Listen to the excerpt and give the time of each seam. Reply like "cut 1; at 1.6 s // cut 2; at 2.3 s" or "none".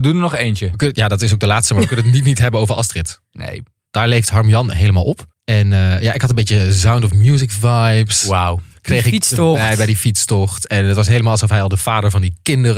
cut 1; at 5.3 s